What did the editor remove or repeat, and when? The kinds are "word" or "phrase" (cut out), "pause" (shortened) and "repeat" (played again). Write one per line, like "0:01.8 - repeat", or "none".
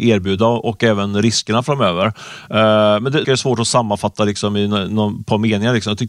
0:03.2 - phrase